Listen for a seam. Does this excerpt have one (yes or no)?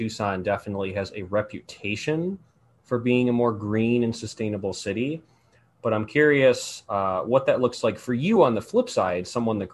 no